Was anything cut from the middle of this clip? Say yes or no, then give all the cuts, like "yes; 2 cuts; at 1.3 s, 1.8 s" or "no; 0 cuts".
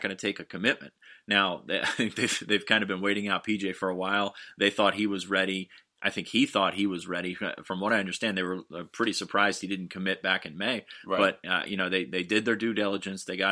no; 0 cuts